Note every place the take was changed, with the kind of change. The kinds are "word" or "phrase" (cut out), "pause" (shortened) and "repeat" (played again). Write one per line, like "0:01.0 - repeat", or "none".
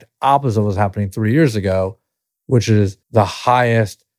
0:03.0 - pause